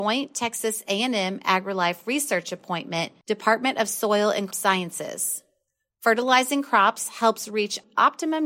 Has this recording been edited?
yes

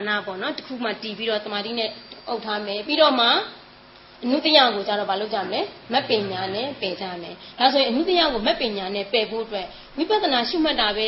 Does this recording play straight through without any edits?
no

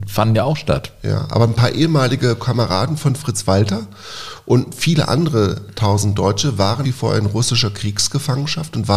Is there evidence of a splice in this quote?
yes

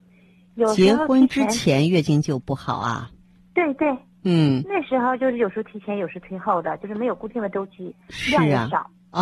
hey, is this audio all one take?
yes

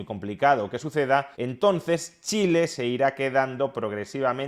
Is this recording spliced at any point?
yes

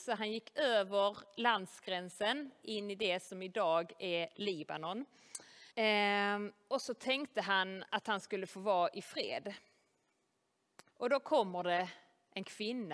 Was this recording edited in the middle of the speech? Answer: yes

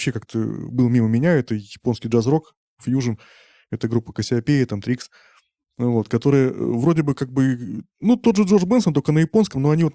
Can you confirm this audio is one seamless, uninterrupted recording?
yes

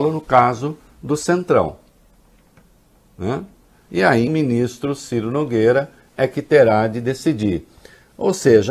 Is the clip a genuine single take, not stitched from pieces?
no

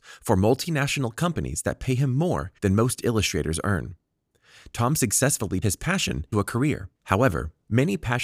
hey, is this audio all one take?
no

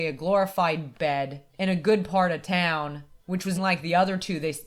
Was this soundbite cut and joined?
yes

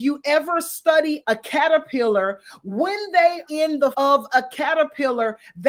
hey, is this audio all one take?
no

